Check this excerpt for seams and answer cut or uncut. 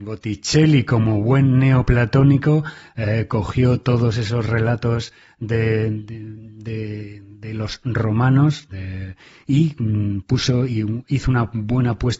uncut